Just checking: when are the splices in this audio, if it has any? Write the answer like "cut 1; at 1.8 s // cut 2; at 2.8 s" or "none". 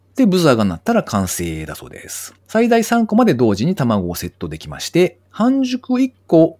cut 1; at 2.4 s // cut 2; at 5.3 s